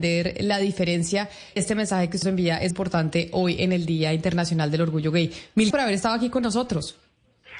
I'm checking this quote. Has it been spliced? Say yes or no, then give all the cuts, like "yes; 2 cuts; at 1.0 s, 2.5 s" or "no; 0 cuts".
yes; 4 cuts; at 1.6 s, 2.2 s, 2.7 s, 5.7 s